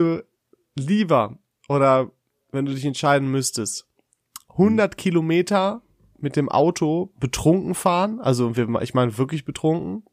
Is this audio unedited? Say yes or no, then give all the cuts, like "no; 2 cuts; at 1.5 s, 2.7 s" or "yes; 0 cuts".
yes; 0 cuts